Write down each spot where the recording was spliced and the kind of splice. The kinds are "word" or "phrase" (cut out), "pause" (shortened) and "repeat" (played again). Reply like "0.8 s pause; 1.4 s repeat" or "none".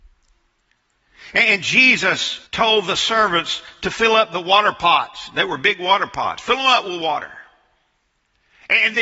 2.5 s pause